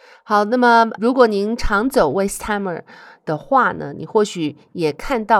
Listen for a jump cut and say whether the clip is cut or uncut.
uncut